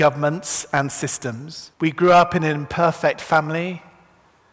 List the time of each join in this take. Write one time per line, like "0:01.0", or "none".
0:01.7